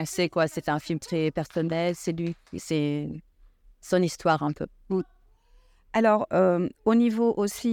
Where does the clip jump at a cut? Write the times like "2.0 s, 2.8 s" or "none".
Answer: none